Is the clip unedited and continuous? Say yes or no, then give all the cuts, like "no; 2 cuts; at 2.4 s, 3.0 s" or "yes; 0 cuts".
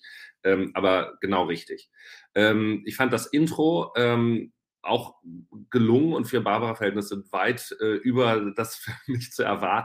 yes; 0 cuts